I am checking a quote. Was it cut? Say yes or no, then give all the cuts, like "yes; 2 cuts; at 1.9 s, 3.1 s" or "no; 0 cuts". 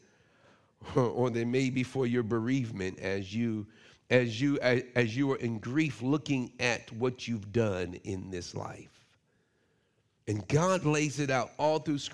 no; 0 cuts